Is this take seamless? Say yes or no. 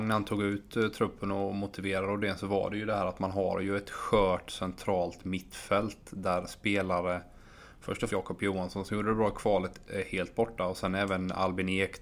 no